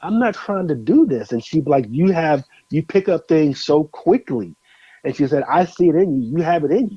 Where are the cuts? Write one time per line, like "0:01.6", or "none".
none